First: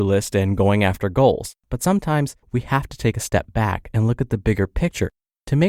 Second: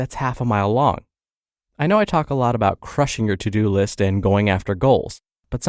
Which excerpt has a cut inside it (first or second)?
first